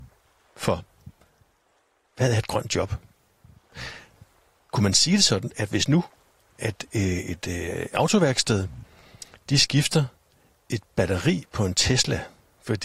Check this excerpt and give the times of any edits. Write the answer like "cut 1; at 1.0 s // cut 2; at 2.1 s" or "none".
none